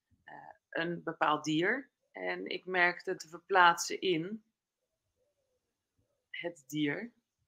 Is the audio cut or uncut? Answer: cut